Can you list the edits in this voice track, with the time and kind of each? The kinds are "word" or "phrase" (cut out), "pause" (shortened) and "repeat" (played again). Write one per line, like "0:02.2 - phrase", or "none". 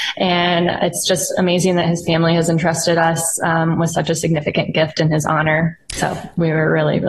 none